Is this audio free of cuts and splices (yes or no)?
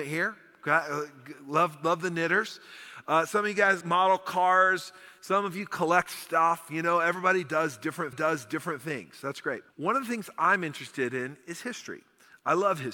no